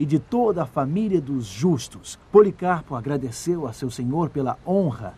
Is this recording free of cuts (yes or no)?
no